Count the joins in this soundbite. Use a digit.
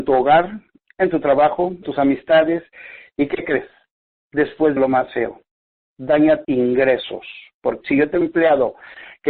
5